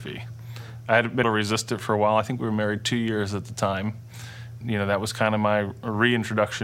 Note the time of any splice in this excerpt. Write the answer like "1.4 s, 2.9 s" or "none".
1.2 s, 4.6 s